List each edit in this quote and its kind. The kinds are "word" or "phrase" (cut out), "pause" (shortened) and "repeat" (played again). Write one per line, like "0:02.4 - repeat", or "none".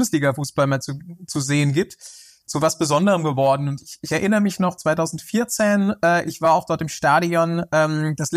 none